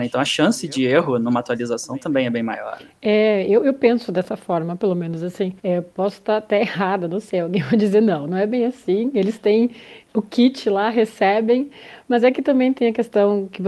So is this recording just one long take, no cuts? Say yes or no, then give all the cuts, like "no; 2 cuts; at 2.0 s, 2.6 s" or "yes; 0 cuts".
no; 1 cut; at 5.6 s